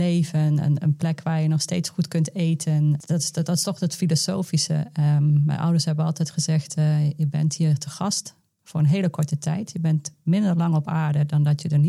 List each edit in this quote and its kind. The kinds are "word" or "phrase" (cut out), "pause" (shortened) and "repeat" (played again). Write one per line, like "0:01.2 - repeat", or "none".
none